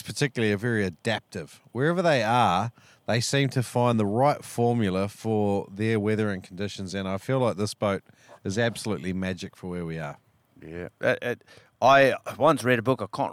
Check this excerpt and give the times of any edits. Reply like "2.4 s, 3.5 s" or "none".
none